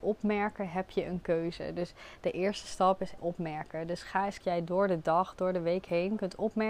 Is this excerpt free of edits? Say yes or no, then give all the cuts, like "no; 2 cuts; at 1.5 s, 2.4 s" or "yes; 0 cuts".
no; 2 cuts; at 3.2 s, 4.4 s